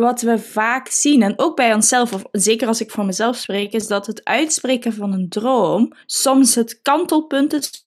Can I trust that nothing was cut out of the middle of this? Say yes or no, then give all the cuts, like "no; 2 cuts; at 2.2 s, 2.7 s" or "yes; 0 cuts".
no; 1 cut; at 6.0 s